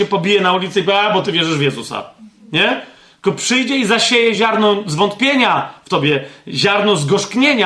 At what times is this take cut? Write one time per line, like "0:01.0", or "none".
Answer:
none